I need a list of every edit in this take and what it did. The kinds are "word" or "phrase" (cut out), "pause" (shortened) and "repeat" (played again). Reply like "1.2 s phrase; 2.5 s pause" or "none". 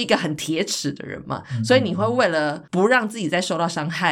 2.7 s pause